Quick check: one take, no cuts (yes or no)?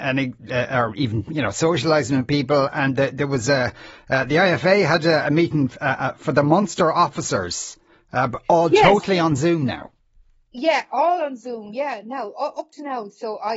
yes